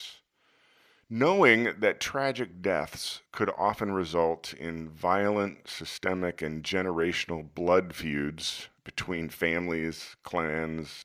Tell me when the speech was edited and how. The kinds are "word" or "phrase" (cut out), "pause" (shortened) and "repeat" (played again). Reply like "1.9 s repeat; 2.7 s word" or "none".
3.3 s pause; 8.8 s pause